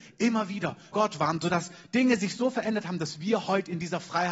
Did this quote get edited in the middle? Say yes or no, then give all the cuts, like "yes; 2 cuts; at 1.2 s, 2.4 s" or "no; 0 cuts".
yes; 1 cut; at 0.9 s